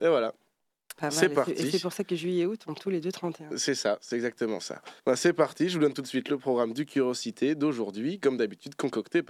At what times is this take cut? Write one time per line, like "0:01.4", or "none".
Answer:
0:05.0